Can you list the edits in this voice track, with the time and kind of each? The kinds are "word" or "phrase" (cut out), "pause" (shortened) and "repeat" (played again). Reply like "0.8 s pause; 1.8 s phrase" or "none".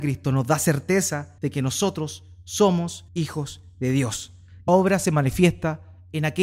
1.4 s pause; 3.1 s pause; 4.7 s word